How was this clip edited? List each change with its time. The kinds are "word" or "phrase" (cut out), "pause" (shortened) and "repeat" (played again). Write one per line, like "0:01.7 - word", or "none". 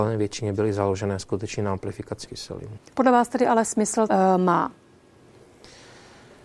0:02.3 - word
0:04.1 - phrase